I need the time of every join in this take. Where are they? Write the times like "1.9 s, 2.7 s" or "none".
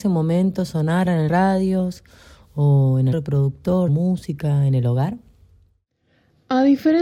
1.3 s, 3.1 s, 3.9 s

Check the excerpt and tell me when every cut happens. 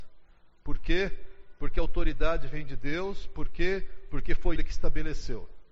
4.6 s

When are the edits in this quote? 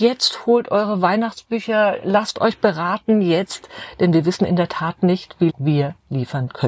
5.5 s

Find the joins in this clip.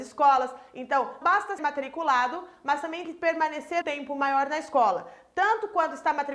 1.2 s, 1.6 s, 3.0 s, 3.8 s

